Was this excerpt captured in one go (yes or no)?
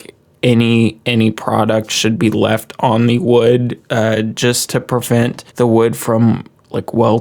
no